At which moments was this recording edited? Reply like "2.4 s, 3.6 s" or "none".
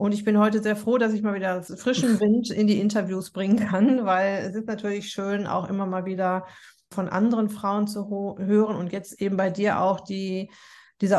none